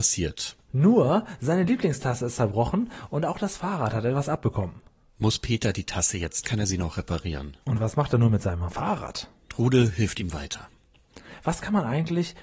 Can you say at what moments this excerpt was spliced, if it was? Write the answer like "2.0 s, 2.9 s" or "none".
6.4 s, 7.6 s